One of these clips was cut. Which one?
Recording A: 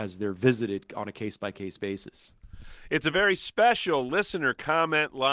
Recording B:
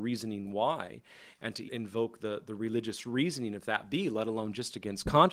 B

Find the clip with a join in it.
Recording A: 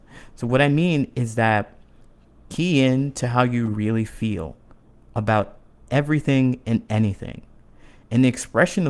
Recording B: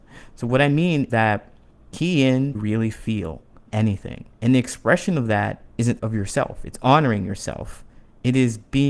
B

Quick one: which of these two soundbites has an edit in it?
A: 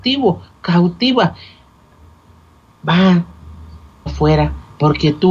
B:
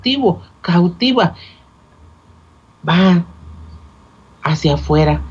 A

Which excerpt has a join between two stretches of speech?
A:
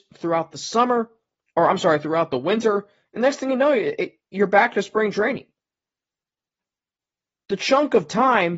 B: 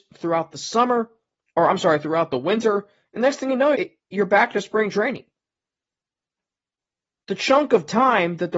B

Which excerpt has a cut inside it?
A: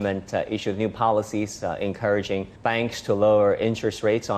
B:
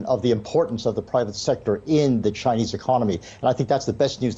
A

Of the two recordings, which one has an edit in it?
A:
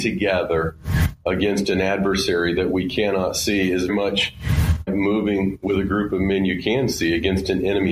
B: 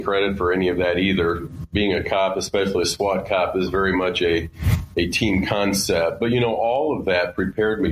A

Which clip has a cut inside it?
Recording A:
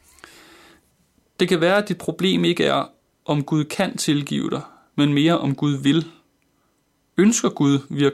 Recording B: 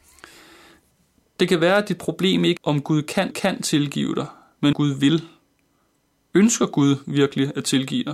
B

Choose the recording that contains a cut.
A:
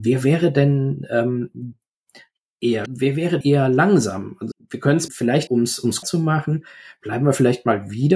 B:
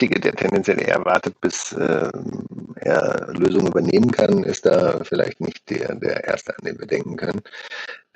A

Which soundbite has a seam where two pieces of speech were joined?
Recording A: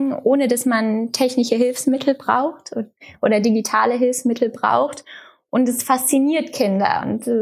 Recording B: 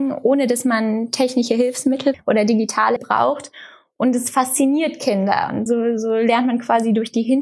B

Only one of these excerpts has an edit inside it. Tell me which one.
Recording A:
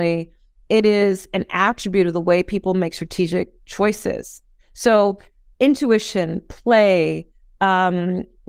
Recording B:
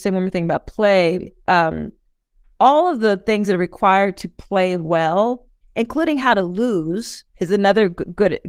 B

